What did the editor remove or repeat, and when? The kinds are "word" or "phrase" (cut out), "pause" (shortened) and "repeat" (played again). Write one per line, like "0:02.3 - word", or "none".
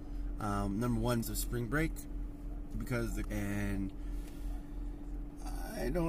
0:01.2 - word
0:02.7 - phrase
0:03.2 - word